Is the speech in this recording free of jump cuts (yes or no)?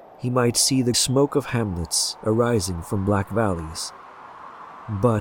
no